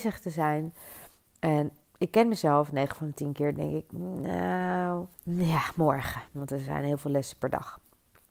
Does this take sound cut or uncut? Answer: cut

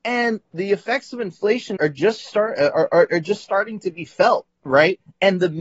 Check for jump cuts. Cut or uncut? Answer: cut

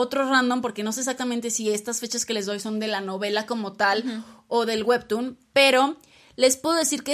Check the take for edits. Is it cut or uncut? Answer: uncut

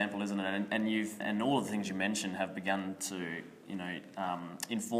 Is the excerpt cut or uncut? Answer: cut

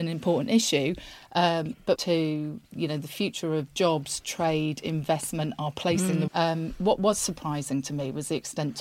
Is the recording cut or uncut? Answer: cut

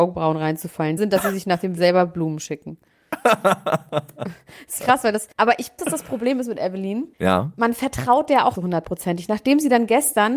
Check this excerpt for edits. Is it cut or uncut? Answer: cut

